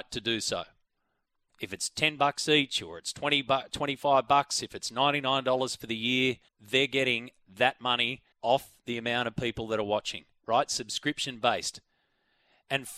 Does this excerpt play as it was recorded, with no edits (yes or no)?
no